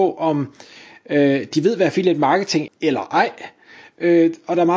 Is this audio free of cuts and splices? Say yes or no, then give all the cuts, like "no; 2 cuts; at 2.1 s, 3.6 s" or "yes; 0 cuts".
no; 1 cut; at 2.7 s